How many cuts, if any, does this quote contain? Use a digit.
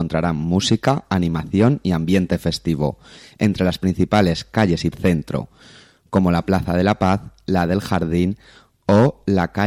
1